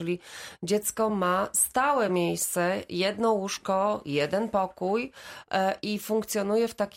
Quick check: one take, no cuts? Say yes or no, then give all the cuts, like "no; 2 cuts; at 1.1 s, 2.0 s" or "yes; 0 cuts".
yes; 0 cuts